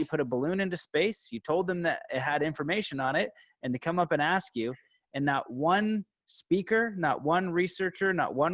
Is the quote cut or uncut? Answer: uncut